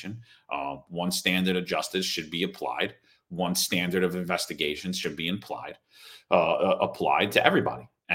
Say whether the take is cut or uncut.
uncut